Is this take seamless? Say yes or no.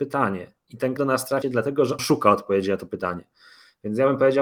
no